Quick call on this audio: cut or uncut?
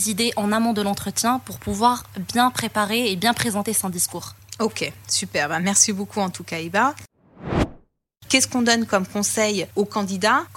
uncut